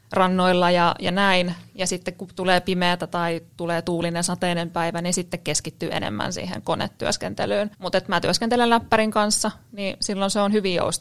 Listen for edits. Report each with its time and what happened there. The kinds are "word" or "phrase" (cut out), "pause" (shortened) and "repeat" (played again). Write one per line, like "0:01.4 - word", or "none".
0:07.7 - pause